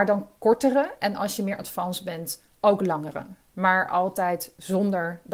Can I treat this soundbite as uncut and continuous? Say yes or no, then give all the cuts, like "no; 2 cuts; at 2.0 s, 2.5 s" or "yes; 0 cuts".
yes; 0 cuts